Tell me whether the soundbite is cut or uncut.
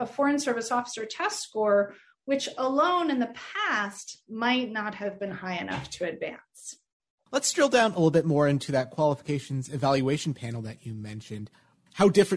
uncut